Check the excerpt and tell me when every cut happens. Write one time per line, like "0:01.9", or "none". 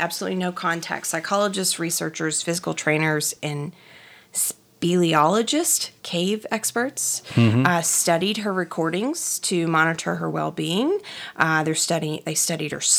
none